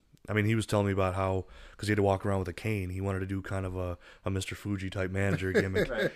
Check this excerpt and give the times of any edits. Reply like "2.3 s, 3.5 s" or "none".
none